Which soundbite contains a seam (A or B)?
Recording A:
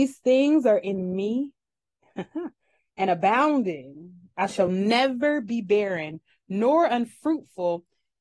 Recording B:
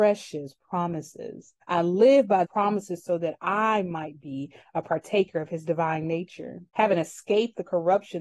B